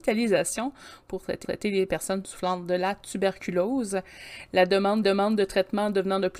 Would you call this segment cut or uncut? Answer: cut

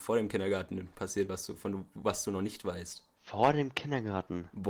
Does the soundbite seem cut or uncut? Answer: cut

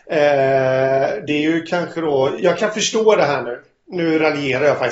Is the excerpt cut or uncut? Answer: uncut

